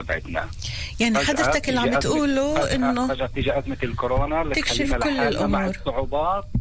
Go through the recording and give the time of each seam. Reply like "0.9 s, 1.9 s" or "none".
none